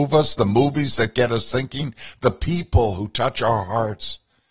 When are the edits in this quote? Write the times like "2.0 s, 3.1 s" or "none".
none